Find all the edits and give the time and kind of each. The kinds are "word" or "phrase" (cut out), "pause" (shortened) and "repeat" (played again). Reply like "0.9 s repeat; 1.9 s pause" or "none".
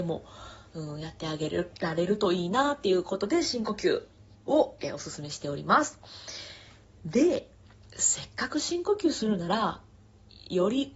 none